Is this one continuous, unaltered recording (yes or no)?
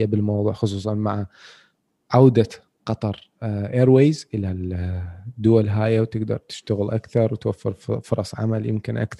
yes